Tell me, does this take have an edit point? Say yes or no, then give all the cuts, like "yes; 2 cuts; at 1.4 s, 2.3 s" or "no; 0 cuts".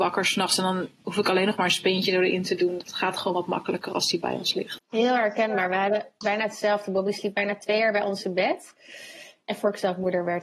yes; 1 cut; at 6.2 s